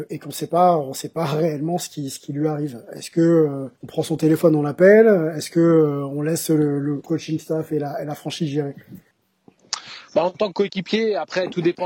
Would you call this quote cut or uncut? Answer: cut